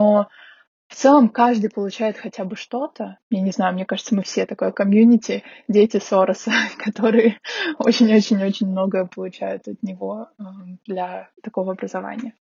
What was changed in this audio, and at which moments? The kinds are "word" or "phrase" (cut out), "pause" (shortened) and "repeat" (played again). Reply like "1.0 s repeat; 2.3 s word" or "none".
11.4 s pause